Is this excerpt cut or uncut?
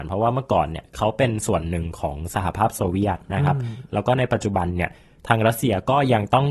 uncut